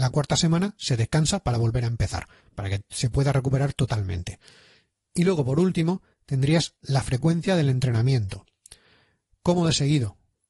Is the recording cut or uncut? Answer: uncut